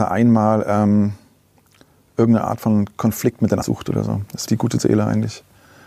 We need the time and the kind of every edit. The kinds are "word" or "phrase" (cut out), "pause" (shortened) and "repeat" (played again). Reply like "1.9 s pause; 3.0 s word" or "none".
3.6 s word; 4.5 s word